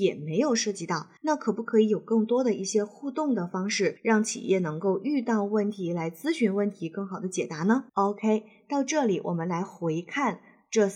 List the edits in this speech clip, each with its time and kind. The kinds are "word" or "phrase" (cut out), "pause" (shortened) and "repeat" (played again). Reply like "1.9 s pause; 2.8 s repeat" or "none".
1.2 s pause; 4.0 s pause; 7.9 s pause